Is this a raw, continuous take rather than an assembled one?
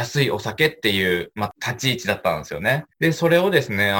no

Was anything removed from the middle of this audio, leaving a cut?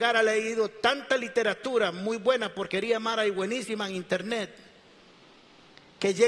no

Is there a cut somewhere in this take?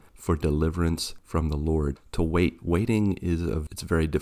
no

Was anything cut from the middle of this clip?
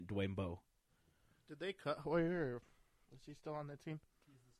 no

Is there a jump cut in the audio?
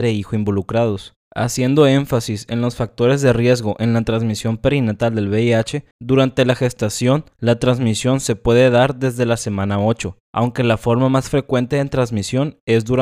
yes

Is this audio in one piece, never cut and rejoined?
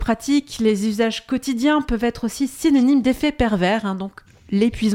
yes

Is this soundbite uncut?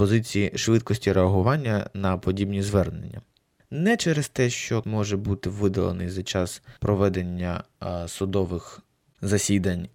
no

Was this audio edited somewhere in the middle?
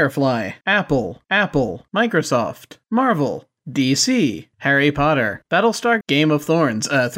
yes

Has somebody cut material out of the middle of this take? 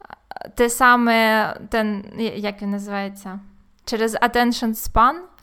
no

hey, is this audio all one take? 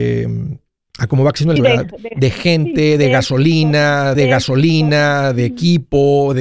no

